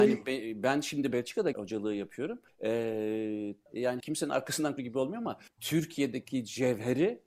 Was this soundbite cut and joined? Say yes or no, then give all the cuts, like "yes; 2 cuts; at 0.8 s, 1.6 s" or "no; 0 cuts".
yes; 5 cuts; at 1.1 s, 1.5 s, 3.7 s, 4.0 s, 4.8 s